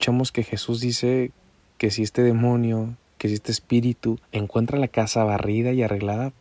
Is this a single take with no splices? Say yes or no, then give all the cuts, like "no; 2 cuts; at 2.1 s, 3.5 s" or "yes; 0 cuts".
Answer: no; 1 cut; at 4.2 s